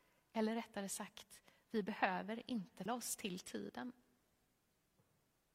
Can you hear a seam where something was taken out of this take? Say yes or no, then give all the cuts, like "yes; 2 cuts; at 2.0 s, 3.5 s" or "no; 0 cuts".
yes; 1 cut; at 2.9 s